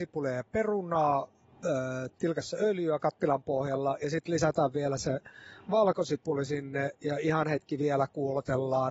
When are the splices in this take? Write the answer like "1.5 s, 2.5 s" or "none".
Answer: none